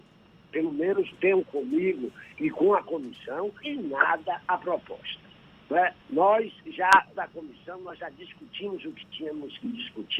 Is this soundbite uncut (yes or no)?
no